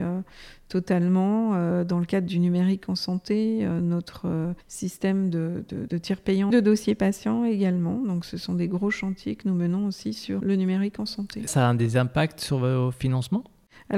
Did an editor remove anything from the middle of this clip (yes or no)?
yes